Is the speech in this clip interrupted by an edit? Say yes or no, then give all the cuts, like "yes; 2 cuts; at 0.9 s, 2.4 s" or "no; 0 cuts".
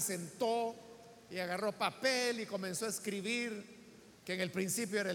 yes; 1 cut; at 4.2 s